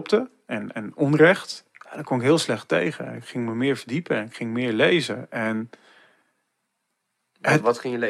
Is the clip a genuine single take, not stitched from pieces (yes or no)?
no